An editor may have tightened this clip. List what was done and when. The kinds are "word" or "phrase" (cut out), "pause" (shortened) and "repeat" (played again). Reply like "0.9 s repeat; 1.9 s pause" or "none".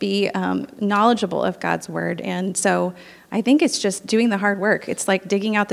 none